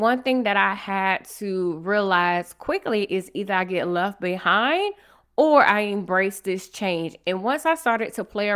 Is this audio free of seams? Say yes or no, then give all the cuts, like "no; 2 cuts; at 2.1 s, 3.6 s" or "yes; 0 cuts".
yes; 0 cuts